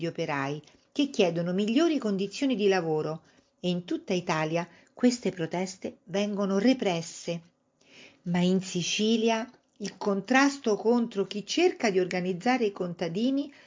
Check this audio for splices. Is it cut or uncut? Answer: uncut